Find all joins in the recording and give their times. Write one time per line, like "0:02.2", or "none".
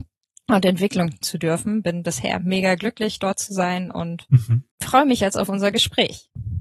0:01.2
0:04.7